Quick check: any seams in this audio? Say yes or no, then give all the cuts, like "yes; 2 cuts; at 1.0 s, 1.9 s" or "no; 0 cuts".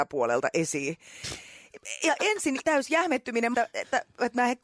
yes; 2 cuts; at 2.6 s, 3.5 s